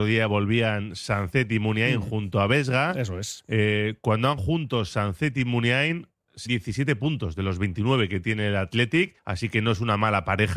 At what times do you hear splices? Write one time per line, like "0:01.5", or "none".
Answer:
0:04.4
0:06.5
0:09.2